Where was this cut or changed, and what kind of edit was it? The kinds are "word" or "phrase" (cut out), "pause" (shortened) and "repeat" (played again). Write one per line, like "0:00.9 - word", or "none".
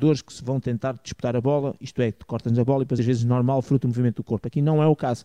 0:03.0 - phrase